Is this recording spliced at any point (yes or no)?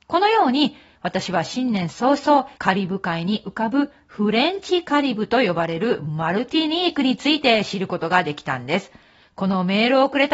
yes